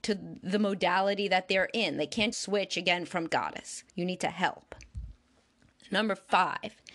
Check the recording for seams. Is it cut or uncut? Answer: cut